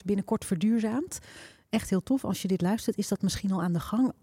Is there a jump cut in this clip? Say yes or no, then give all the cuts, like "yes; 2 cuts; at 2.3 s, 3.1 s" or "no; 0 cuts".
no; 0 cuts